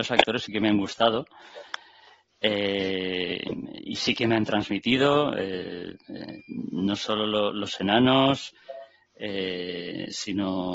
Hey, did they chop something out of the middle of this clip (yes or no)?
no